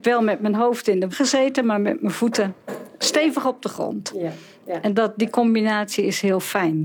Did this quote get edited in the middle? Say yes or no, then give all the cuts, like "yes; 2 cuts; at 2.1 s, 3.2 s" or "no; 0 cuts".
yes; 1 cut; at 1.1 s